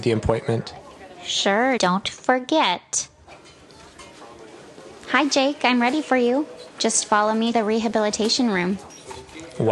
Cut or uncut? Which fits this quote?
cut